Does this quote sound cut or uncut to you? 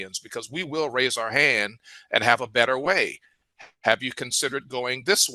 uncut